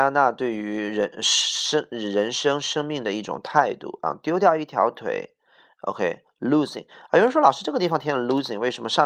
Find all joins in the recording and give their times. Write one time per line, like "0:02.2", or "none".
none

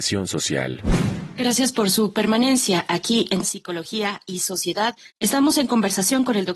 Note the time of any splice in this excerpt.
0:03.4
0:05.1

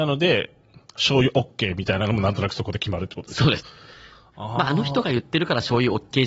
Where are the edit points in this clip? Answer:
0:03.6

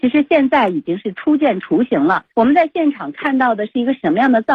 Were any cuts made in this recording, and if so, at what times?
0:02.3

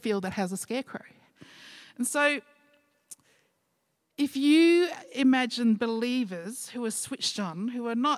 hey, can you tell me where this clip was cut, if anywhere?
none

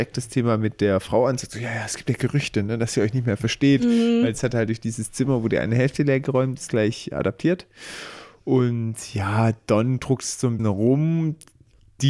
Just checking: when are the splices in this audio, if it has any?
0:10.6

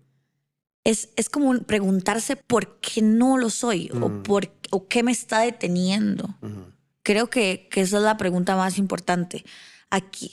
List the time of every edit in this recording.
0:02.4

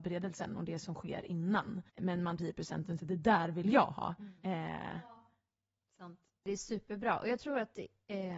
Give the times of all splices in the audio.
0:01.9
0:02.4
0:03.0
0:04.4

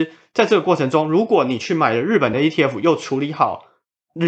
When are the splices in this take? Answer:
none

